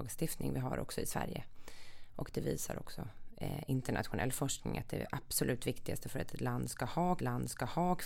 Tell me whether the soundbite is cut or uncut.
cut